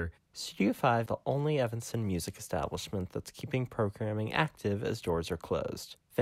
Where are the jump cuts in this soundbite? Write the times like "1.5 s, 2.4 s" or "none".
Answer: 1.1 s